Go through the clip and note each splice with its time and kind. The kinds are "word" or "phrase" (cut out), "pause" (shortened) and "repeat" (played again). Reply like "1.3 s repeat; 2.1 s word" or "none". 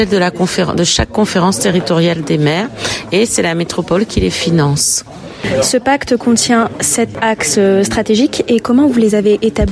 none